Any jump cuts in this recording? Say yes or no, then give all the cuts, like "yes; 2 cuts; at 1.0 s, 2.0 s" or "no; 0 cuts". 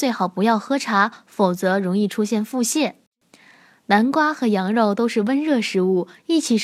no; 0 cuts